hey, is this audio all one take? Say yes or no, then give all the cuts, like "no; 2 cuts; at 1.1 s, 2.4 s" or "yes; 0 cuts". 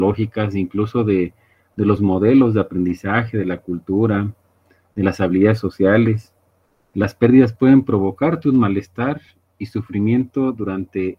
yes; 0 cuts